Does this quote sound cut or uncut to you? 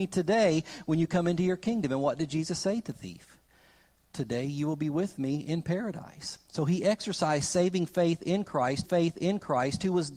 cut